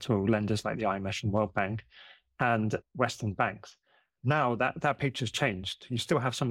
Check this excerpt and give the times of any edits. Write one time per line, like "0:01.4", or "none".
none